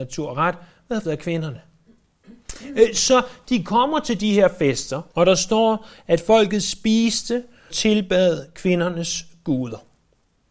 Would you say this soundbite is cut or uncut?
cut